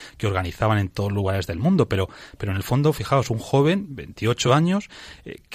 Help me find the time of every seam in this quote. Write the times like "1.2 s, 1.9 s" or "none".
none